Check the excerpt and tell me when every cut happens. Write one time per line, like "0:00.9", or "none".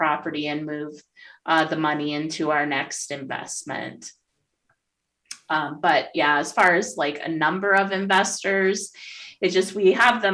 none